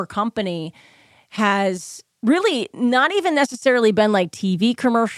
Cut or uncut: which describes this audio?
cut